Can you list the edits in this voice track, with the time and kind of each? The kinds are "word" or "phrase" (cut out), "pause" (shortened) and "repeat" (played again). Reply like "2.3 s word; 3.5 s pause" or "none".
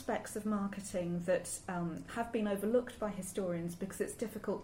none